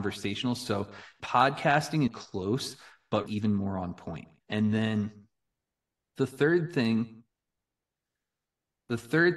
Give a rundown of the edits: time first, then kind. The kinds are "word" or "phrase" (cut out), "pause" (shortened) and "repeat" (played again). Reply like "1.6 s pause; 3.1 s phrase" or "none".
1.2 s word; 2.1 s phrase; 3.3 s phrase; 4.4 s word